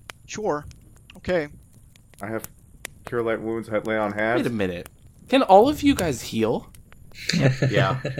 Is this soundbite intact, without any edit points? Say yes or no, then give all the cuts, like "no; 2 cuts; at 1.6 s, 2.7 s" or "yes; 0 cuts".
yes; 0 cuts